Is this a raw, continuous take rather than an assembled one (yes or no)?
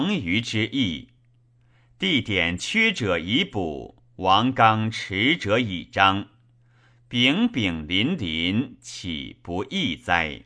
yes